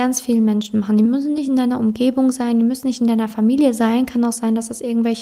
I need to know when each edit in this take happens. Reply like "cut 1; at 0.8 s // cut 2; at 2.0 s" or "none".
none